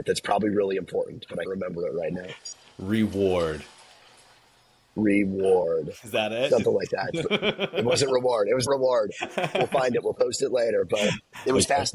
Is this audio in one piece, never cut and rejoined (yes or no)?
no